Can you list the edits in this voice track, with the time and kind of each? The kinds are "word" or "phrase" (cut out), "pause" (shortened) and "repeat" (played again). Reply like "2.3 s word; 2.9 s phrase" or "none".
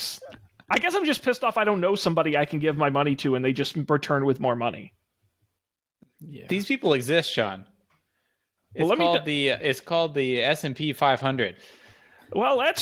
none